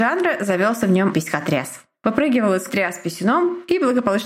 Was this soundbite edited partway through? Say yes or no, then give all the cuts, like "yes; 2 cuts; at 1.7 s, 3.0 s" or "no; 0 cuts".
yes; 2 cuts; at 1.1 s, 2.7 s